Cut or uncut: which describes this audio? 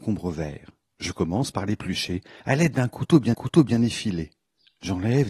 cut